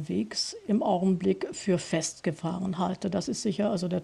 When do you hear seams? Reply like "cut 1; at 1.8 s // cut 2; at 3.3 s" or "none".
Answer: none